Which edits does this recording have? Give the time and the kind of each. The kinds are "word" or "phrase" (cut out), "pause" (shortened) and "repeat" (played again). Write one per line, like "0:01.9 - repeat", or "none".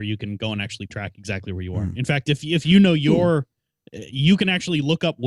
none